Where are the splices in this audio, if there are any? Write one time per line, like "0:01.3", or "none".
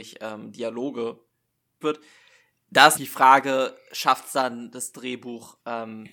0:01.8
0:03.0